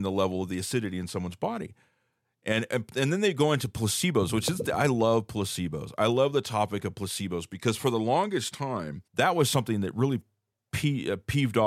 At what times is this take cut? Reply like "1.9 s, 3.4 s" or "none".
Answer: 9.1 s